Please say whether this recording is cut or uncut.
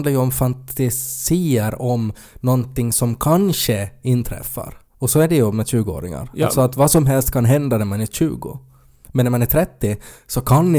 cut